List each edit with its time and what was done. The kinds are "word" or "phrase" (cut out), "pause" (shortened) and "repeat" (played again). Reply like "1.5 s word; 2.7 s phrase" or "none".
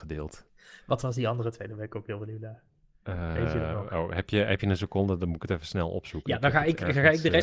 none